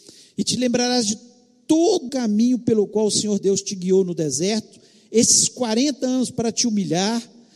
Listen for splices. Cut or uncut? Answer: cut